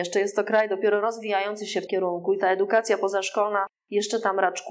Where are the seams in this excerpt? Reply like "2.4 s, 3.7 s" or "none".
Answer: 1.9 s